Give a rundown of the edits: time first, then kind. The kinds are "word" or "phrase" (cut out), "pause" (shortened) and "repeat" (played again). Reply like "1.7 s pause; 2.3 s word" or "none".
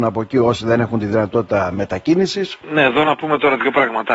none